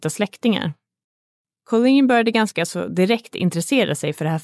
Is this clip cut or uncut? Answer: uncut